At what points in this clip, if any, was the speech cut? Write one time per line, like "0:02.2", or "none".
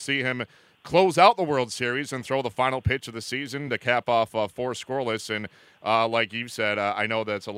none